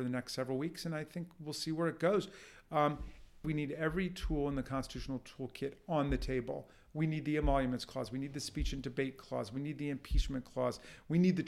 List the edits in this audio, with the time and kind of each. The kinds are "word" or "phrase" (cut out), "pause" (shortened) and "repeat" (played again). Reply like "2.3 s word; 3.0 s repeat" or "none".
3.4 s phrase